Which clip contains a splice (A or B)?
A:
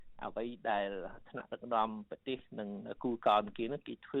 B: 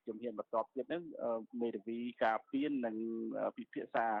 B